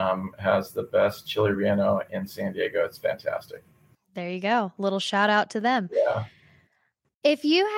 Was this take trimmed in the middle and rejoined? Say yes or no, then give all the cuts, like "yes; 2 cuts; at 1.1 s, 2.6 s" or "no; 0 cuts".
no; 0 cuts